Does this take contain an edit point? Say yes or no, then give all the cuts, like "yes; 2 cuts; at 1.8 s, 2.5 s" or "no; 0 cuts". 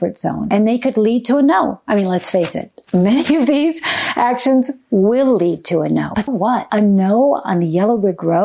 yes; 1 cut; at 6.3 s